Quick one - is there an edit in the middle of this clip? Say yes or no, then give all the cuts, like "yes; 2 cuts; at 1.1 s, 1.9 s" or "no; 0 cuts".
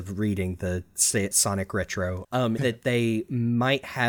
yes; 3 cuts; at 1.3 s, 2.2 s, 2.6 s